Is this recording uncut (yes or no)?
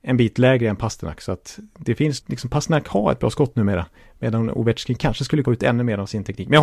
no